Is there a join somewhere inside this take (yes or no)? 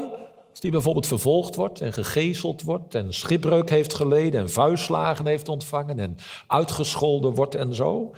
no